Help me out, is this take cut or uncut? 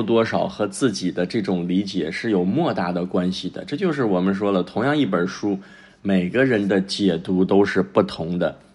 uncut